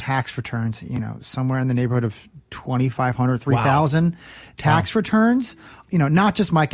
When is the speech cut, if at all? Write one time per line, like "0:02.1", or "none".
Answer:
none